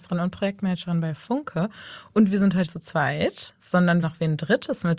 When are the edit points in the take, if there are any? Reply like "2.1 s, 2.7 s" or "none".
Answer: 2.7 s, 4.0 s

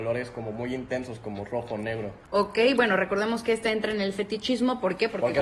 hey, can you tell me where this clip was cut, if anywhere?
2.2 s

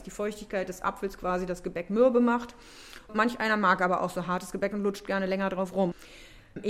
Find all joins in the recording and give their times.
none

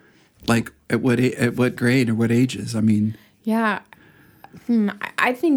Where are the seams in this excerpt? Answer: none

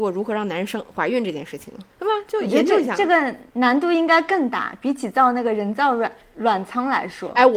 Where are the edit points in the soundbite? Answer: 1.9 s, 3.5 s

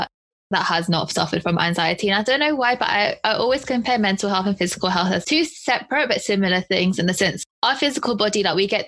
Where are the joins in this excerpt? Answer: 7.5 s

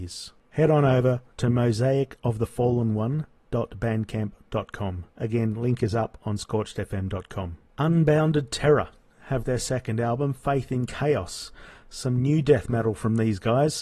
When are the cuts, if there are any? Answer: 1.3 s, 5.1 s, 7.7 s, 9.4 s

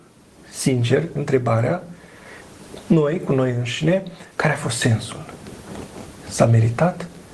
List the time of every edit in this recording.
4.3 s

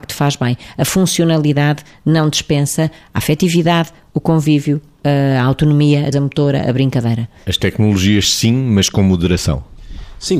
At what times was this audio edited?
6.1 s

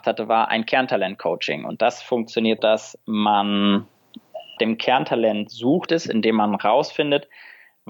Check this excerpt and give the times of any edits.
2.6 s, 4.6 s, 5.9 s

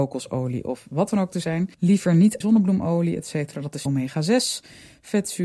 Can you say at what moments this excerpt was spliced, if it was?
1.7 s, 2.4 s, 3.9 s

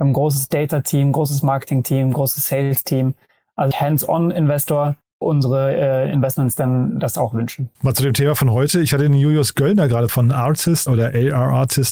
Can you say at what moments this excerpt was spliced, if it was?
3.7 s, 5.2 s, 7.7 s, 10.1 s, 10.9 s

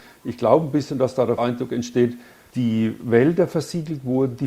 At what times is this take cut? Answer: 1.4 s, 2.5 s

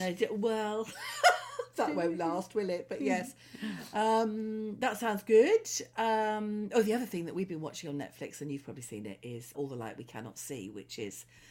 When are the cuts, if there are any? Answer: 9.5 s

